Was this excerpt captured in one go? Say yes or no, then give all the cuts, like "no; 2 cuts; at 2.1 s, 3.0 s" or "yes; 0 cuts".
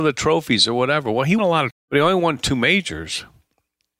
no; 2 cuts; at 1.4 s, 1.7 s